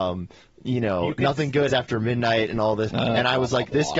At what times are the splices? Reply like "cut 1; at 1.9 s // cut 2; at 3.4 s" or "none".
cut 1; at 1.7 s // cut 2; at 2.9 s